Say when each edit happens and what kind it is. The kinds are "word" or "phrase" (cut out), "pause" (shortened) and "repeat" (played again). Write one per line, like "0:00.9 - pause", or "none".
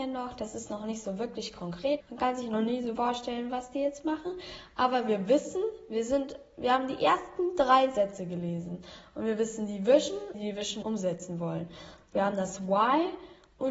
0:02.0 - word
0:03.0 - word
0:10.3 - phrase
0:10.8 - word